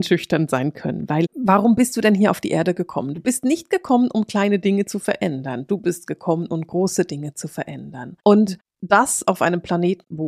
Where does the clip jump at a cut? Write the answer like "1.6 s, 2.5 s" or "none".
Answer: none